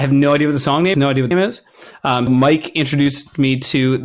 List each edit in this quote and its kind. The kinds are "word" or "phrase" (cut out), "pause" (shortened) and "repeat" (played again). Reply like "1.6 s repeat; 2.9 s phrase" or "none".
0.9 s word; 1.3 s phrase; 2.3 s word